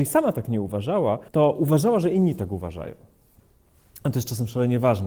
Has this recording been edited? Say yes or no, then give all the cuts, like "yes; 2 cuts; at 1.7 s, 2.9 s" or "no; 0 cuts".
yes; 1 cut; at 1.3 s